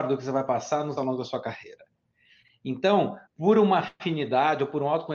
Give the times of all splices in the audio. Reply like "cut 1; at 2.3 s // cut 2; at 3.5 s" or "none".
cut 1; at 1.0 s // cut 2; at 3.3 s